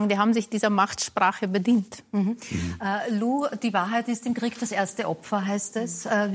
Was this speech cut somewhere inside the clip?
no; 0 cuts

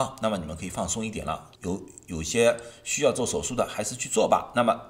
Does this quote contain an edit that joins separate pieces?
yes; 1 cut; at 1.6 s

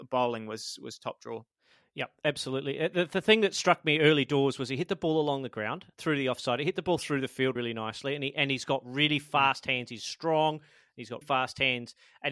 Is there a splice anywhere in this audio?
yes; 2 cuts; at 7.6 s, 11.2 s

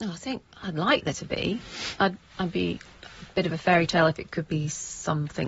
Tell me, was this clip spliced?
no; 0 cuts

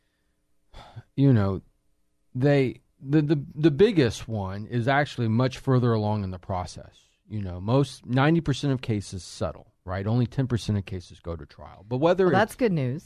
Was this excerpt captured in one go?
no; 2 cuts; at 1.1 s, 2.9 s

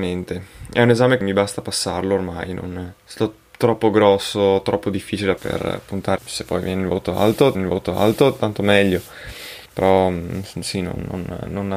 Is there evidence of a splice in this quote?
yes; 6 cuts; at 1.2 s, 3.0 s, 5.4 s, 6.2 s, 7.5 s, 9.7 s

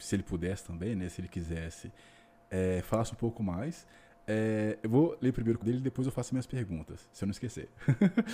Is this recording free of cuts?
no; 1 cut; at 5.6 s

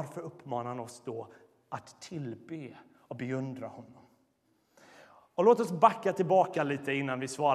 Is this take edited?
no; 0 cuts

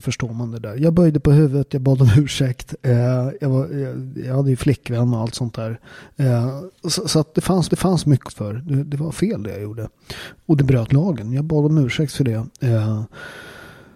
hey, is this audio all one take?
no; 4 cuts; at 6.8 s, 7.7 s, 8.3 s, 10.9 s

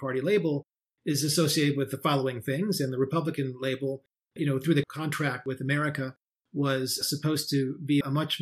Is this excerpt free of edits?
yes; 0 cuts

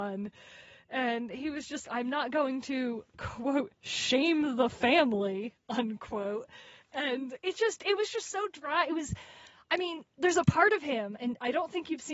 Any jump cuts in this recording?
yes; 2 cuts; at 1.8 s, 10.1 s

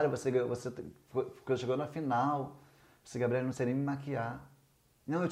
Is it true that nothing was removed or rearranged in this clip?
yes; 0 cuts

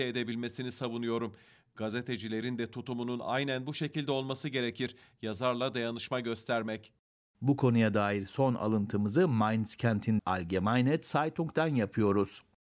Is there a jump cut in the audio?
yes; 1 cut; at 10.2 s

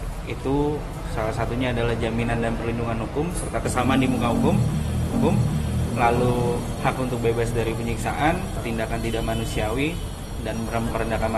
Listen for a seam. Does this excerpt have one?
yes; 1 cut; at 5.1 s

